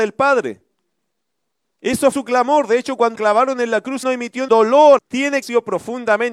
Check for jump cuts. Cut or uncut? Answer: cut